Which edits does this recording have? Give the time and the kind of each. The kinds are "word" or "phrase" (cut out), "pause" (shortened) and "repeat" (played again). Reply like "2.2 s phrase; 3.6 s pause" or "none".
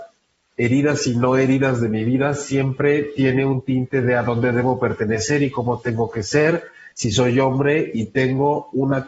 6.9 s pause